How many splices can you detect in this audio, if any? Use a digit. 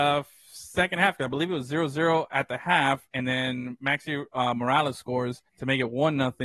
1